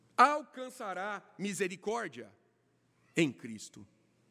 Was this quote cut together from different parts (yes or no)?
no